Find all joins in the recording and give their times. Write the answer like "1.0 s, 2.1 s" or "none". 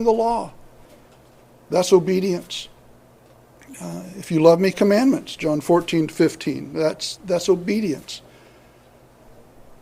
4.7 s, 7.2 s